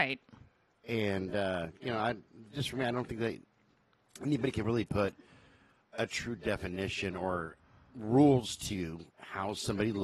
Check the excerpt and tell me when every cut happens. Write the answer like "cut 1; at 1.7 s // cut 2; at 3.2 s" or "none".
none